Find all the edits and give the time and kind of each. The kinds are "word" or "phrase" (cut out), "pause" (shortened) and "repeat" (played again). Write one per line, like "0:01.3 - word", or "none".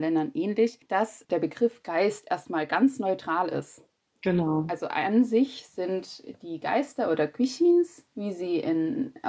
none